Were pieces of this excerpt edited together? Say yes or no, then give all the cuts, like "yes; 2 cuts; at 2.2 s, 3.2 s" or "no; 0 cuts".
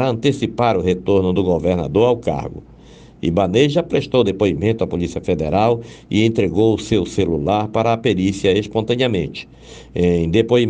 no; 0 cuts